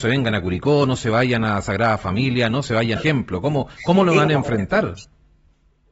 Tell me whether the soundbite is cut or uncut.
cut